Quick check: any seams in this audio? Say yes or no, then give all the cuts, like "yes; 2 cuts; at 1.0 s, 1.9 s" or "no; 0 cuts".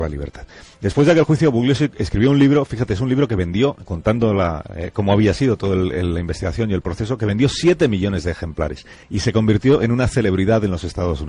yes; 1 cut; at 9.0 s